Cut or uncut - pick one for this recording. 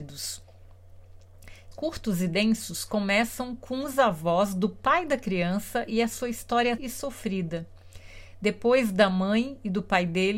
cut